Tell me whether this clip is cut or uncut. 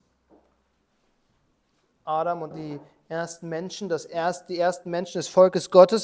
cut